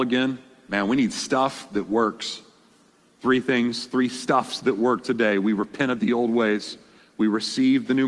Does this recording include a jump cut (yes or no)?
no